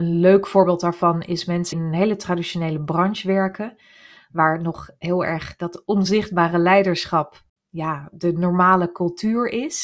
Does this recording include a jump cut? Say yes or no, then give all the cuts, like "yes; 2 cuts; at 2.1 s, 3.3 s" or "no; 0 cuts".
yes; 1 cut; at 1.7 s